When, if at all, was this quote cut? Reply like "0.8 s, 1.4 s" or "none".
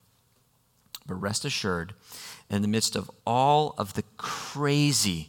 3.2 s